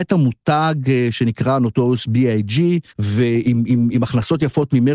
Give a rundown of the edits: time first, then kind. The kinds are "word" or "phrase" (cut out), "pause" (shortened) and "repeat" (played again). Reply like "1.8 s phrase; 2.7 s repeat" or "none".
2.9 s pause